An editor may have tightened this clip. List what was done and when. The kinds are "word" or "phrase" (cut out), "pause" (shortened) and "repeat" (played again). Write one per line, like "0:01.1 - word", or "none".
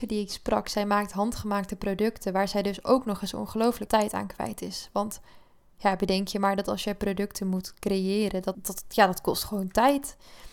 0:03.9 - word
0:08.5 - word